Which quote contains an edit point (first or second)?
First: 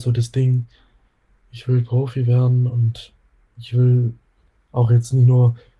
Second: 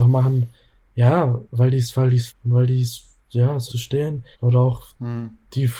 second